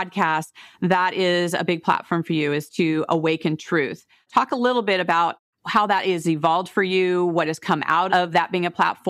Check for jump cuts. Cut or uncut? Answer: cut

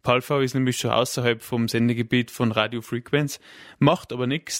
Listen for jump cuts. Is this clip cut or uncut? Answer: uncut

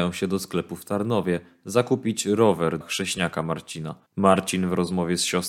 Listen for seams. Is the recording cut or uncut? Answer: cut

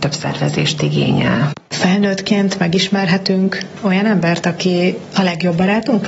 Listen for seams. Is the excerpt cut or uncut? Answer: uncut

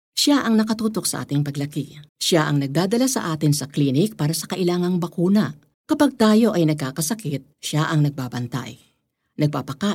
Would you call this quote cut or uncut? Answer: cut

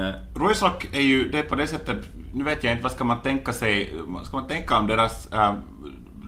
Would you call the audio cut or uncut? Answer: uncut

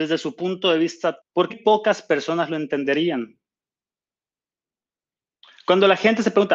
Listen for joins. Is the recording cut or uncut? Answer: cut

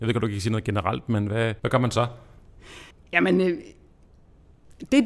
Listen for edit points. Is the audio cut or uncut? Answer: cut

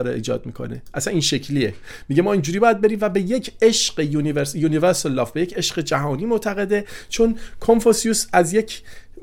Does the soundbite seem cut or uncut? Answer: uncut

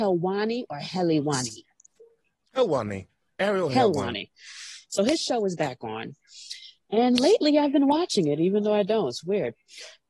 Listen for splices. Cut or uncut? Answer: uncut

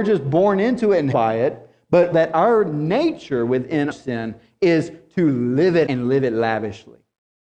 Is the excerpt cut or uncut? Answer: cut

